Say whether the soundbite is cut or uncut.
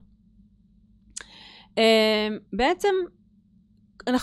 cut